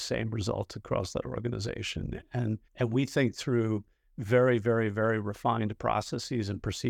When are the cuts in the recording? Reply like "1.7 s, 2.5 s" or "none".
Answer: 2.7 s